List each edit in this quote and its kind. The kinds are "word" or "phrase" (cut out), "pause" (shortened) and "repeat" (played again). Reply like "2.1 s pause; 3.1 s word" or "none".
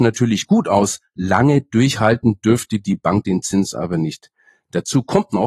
none